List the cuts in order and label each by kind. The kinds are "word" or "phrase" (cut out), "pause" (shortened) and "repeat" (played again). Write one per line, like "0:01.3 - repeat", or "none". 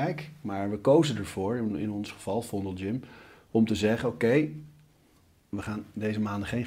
none